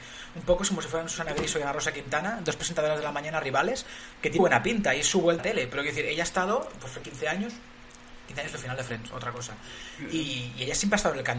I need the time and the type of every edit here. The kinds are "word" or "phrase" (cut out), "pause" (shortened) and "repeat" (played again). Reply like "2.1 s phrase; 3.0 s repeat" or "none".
4.4 s word; 5.4 s word; 7.0 s phrase